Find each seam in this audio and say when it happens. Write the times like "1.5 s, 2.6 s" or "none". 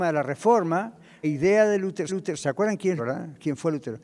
1.2 s, 2.1 s, 3.0 s